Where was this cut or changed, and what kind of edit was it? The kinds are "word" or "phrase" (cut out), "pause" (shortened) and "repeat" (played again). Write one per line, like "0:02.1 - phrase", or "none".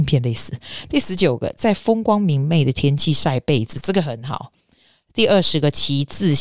none